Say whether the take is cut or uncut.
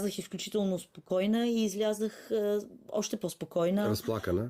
uncut